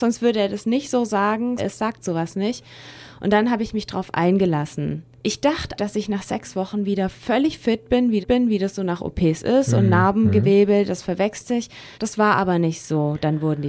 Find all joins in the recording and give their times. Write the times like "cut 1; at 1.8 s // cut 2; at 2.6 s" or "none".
cut 1; at 1.6 s // cut 2; at 5.2 s // cut 3; at 5.8 s // cut 4; at 8.2 s // cut 5; at 11.9 s